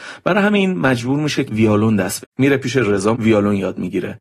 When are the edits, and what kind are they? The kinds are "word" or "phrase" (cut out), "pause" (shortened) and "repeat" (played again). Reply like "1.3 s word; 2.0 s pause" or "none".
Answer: 1.5 s word; 2.2 s word; 3.1 s word

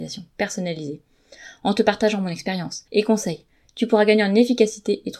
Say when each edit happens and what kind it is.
2.9 s pause

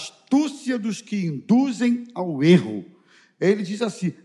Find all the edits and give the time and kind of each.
none

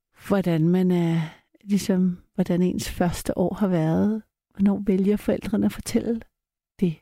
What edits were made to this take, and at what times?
none

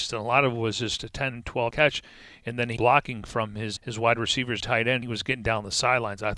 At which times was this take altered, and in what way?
1.7 s word; 2.8 s word; 3.8 s word; 4.6 s word; 5.0 s word

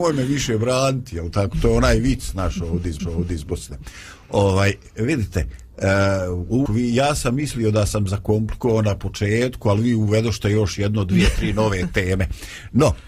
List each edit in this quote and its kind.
3.0 s repeat; 6.7 s word

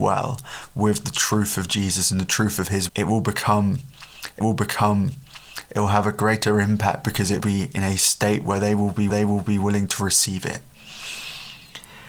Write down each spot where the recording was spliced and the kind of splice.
2.9 s word; 4.4 s repeat; 7.4 s word; 9.1 s repeat

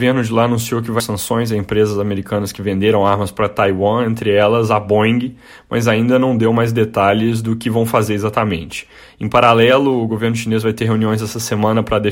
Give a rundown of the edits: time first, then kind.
1.0 s word

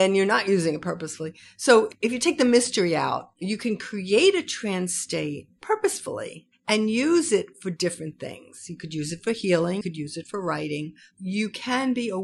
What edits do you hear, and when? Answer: 9.8 s word

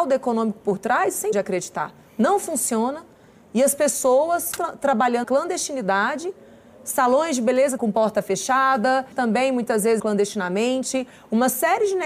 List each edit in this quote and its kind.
1.3 s word; 4.6 s word; 5.2 s word; 7.8 s word; 9.1 s word; 10.0 s word

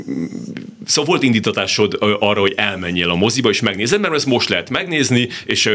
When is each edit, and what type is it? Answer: none

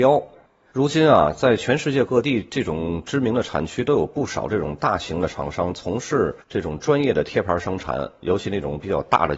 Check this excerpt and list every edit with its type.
6.4 s pause

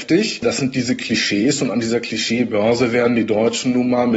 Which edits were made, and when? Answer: none

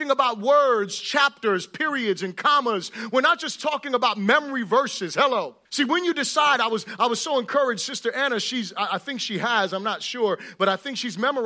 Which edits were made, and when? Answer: 5.7 s pause

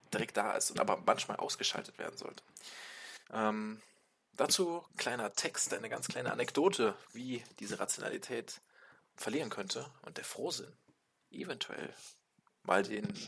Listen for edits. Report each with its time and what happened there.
3.2 s pause; 5.0 s word; 9.2 s word

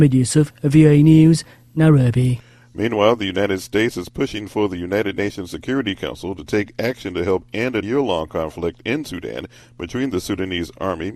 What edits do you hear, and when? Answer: 7.8 s word

